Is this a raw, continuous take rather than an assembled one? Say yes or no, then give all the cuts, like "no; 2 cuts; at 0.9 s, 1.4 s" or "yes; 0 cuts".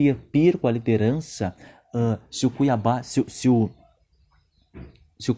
yes; 0 cuts